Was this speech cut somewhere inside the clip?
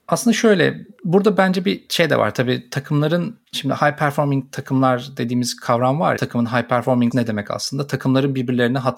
yes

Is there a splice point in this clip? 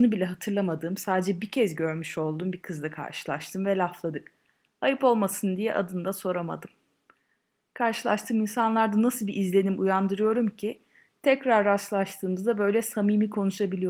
no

